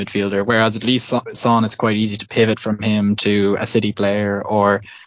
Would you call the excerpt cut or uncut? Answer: uncut